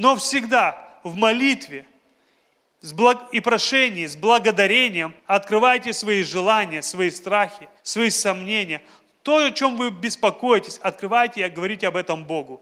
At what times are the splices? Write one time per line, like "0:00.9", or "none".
0:05.2
0:07.8